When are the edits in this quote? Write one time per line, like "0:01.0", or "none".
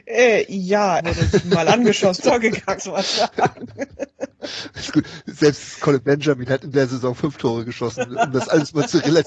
0:01.0
0:02.2
0:02.8